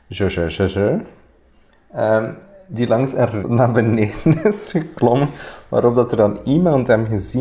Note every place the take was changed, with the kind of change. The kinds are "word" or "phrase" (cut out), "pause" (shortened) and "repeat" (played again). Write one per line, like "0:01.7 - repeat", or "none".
0:03.4 - word